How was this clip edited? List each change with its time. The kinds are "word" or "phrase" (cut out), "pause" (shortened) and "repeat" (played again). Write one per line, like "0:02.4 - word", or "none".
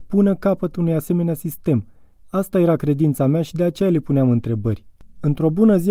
none